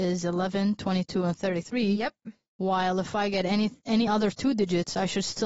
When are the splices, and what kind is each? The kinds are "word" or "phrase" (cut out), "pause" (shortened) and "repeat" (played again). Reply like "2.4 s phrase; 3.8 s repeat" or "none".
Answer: none